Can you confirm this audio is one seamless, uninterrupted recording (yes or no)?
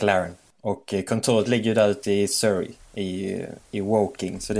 yes